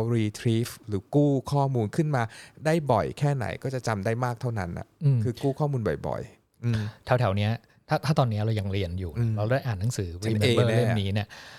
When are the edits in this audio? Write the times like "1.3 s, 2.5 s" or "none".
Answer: none